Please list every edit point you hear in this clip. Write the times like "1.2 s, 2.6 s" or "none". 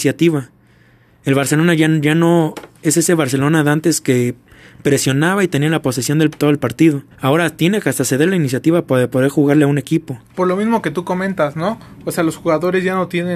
7.1 s, 10.2 s